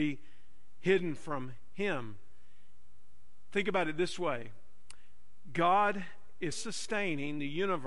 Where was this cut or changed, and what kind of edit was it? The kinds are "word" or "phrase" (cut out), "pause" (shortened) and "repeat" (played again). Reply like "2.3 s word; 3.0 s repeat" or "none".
6.5 s word

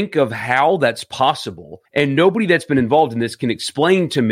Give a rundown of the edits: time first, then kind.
1.8 s pause

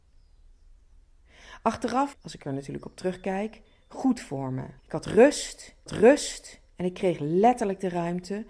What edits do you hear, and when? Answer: 2.1 s phrase; 4.8 s pause; 5.9 s repeat

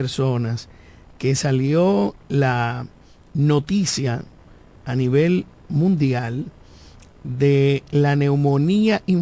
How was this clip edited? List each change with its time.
none

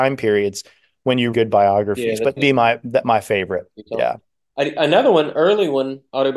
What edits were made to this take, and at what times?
1.3 s word; 2.4 s phrase

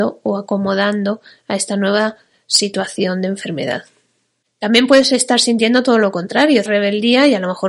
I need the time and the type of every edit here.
6.7 s word

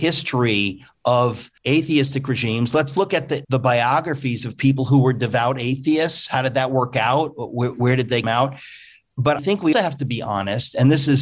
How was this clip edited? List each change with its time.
1.6 s pause; 3.4 s word; 7.7 s word; 8.2 s word; 9.4 s word; 9.7 s word

